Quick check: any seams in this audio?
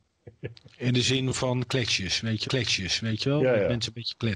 yes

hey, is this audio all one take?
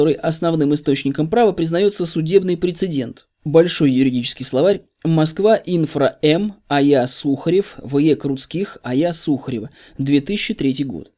no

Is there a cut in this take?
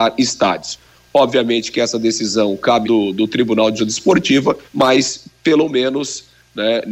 yes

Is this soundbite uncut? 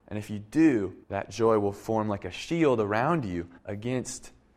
no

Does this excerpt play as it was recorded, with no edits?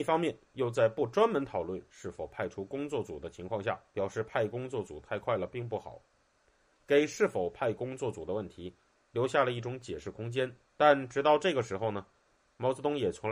no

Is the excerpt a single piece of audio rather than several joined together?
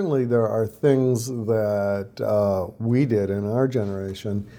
yes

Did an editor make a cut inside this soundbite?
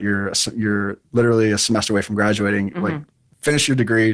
no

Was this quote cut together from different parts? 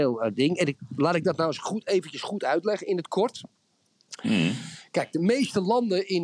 no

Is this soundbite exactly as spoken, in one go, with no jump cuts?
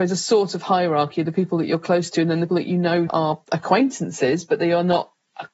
no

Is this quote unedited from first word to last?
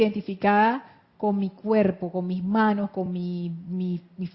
yes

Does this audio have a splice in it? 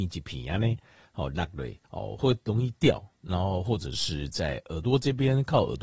yes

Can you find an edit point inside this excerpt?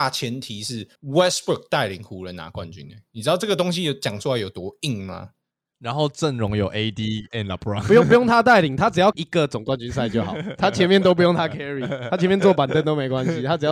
yes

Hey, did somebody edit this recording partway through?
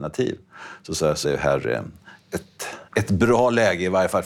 yes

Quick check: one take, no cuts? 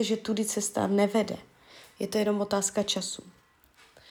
yes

